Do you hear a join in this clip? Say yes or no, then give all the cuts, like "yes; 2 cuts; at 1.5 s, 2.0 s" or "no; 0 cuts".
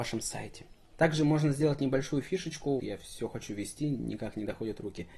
yes; 1 cut; at 2.8 s